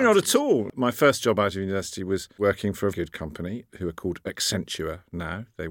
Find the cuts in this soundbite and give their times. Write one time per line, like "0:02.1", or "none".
0:02.9
0:03.7